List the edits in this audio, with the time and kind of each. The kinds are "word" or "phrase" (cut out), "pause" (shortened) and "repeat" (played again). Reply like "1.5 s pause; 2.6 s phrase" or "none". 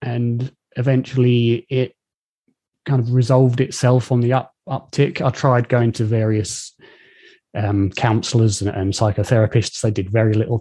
none